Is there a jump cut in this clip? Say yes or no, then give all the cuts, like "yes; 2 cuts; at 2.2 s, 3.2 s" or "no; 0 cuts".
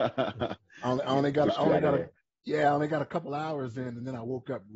no; 0 cuts